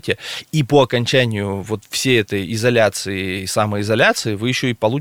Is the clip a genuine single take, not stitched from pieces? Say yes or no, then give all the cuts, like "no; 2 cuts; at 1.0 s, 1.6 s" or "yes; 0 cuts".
yes; 0 cuts